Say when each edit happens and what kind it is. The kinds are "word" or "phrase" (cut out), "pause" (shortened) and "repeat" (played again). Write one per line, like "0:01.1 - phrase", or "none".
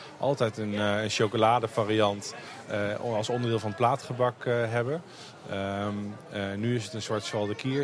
none